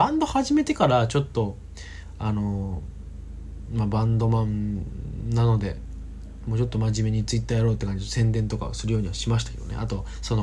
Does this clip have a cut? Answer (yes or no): no